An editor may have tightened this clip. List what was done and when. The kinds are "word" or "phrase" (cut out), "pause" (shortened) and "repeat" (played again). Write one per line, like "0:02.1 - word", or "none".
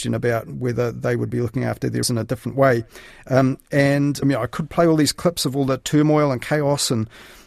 0:02.0 - word
0:04.2 - word

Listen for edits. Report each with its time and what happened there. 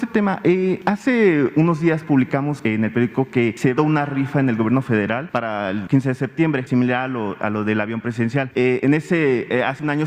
0:03.8 - phrase

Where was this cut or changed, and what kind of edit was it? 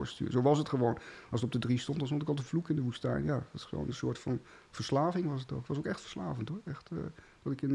none

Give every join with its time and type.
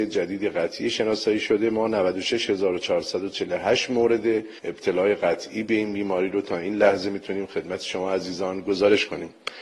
0:04.6 - pause

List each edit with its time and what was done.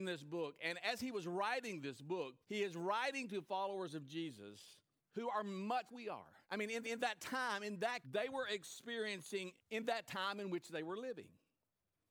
0:02.4 - pause
0:05.0 - pause
0:05.9 - word
0:06.4 - pause
0:06.8 - repeat
0:08.0 - word
0:09.6 - phrase

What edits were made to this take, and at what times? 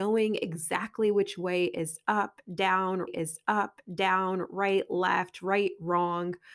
0:03.1 - repeat

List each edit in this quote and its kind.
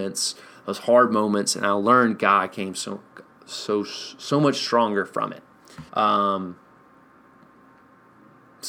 0:05.9 - pause

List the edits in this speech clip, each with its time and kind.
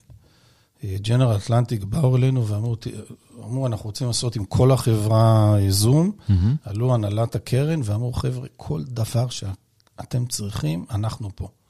none

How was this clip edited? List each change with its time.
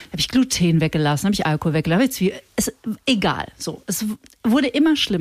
none

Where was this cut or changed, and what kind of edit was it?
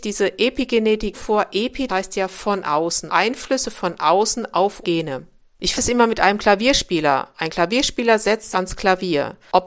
0:01.1 - word
0:01.9 - word
0:03.1 - word
0:04.8 - word
0:05.7 - word
0:08.5 - word

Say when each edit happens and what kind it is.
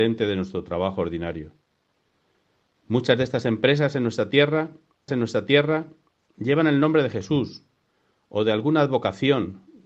0:05.1 - repeat

